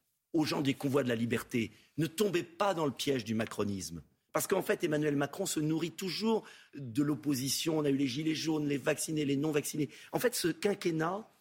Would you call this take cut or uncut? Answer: uncut